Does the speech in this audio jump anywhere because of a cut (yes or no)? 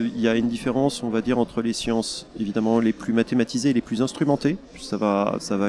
no